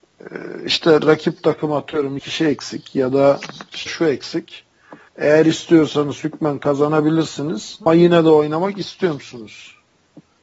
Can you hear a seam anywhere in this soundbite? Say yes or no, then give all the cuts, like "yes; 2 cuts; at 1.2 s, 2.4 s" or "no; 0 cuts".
yes; 4 cuts; at 2.2 s, 3.9 s, 5.1 s, 7.9 s